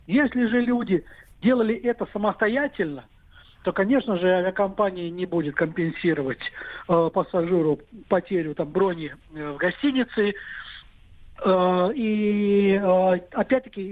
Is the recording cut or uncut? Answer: uncut